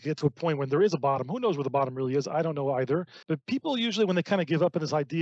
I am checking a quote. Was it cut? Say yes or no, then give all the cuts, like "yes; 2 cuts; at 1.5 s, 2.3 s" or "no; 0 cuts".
yes; 1 cut; at 3.2 s